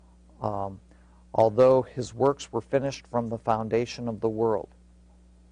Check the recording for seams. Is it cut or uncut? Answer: uncut